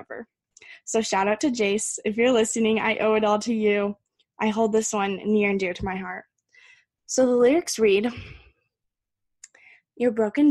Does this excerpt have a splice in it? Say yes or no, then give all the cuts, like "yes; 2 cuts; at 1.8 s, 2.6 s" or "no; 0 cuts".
no; 0 cuts